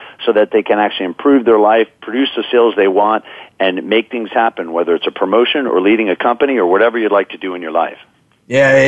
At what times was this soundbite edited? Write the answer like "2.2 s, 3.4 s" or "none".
none